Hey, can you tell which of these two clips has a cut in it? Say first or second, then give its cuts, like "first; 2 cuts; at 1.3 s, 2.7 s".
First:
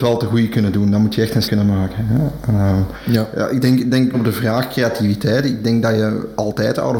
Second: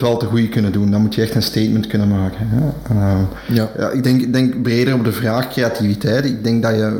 first; 2 cuts; at 1.4 s, 4.1 s